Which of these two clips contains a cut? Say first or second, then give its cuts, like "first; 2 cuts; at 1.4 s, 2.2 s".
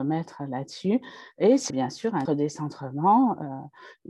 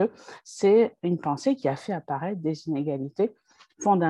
first; 2 cuts; at 1.7 s, 2.2 s